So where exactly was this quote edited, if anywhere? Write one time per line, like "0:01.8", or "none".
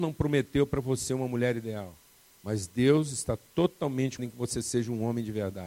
0:02.2
0:04.2